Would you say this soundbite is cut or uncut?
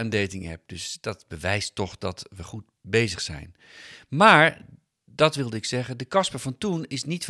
uncut